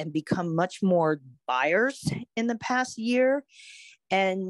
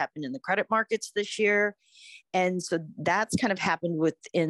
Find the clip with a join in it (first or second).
first